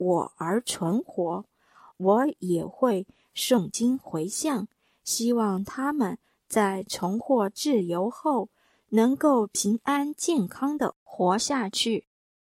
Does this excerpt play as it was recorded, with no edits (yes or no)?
yes